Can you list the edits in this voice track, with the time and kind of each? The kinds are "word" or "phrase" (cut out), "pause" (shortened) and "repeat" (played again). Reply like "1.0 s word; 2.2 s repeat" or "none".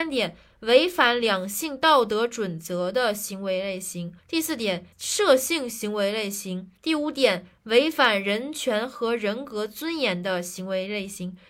4.2 s pause; 4.9 s pause; 6.8 s pause